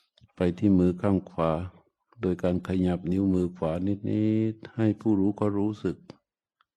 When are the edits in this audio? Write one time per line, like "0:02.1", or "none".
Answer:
none